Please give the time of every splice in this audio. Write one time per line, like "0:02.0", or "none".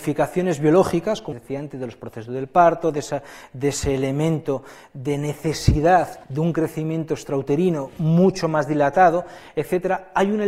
0:01.3
0:06.2

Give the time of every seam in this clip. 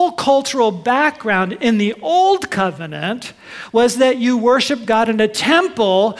none

